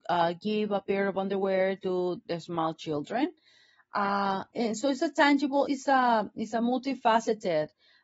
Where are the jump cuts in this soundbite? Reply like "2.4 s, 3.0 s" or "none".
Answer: 2.2 s, 4.5 s, 5.7 s